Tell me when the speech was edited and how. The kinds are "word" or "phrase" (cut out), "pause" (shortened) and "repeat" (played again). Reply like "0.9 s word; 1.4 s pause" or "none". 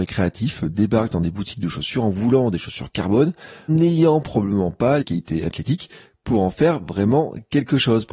3.7 s word; 5.0 s phrase